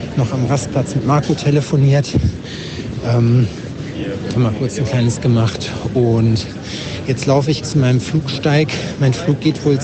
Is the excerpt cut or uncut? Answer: cut